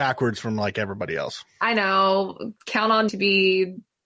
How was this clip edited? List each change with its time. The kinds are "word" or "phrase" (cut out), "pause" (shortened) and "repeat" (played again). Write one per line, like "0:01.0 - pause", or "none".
0:02.6 - pause
0:03.1 - word